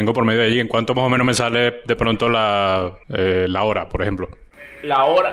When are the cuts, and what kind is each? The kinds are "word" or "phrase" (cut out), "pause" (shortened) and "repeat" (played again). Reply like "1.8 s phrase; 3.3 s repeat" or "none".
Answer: 3.0 s pause